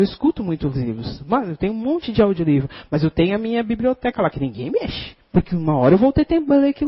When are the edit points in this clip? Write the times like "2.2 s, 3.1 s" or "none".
5.2 s